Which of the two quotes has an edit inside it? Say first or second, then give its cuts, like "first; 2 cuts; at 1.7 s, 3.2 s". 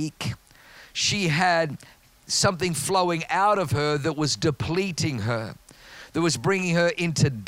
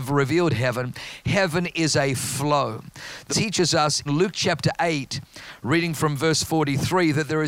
second; 2 cuts; at 3.3 s, 4.1 s